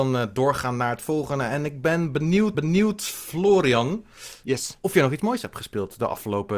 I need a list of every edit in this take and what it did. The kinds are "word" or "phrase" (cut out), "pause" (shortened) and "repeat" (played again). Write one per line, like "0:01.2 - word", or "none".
0:02.5 - repeat

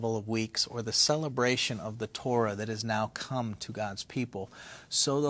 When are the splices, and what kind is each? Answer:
none

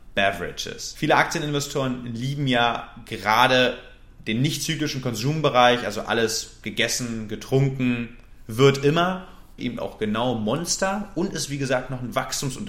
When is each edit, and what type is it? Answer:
0:09.6 - phrase

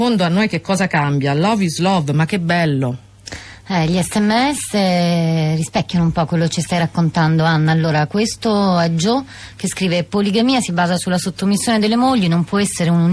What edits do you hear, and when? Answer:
none

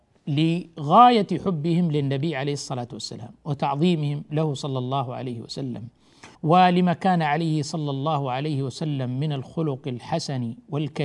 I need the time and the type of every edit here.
0:06.3 - pause

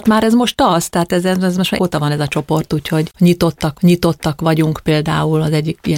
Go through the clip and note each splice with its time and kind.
0:01.8 - word
0:03.7 - repeat

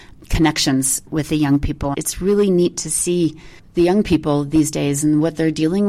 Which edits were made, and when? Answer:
0:03.6 - pause

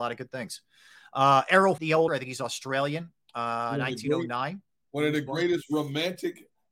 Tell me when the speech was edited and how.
0:01.8 - word
0:02.1 - word

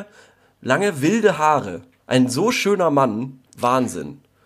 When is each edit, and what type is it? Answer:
0:02.0 - pause
0:03.5 - pause

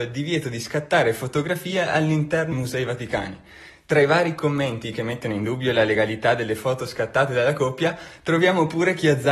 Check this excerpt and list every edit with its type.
0:02.5 - word

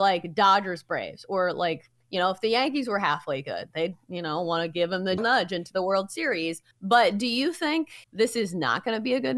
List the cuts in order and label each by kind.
0:05.2 - word
0:06.7 - pause
0:08.0 - pause

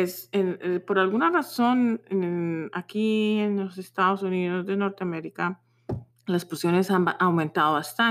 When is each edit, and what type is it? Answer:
0:06.1 - pause

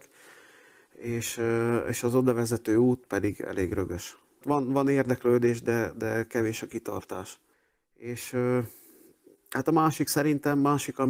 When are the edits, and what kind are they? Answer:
0:03.1 - word
0:07.5 - pause

